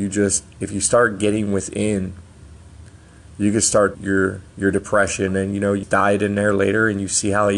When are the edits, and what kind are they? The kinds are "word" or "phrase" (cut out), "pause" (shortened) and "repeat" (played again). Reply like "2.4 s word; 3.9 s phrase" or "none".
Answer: 3.9 s word; 5.3 s word; 5.8 s word